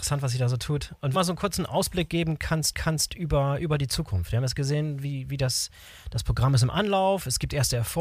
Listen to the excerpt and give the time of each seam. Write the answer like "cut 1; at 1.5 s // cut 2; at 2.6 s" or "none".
cut 1; at 1.1 s // cut 2; at 2.7 s